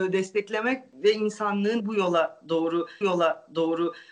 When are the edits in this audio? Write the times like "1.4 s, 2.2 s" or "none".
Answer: 1.8 s, 3.0 s